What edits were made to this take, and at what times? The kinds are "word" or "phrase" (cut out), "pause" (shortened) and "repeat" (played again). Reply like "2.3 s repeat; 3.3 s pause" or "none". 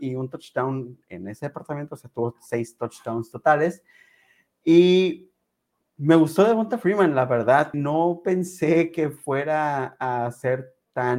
7.7 s word